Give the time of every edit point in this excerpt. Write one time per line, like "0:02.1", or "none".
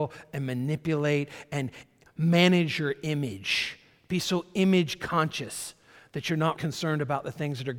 0:06.6